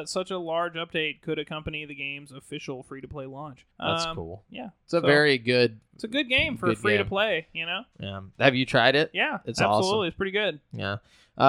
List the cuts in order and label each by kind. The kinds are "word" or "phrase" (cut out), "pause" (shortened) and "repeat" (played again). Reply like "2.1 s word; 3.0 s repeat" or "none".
3.7 s pause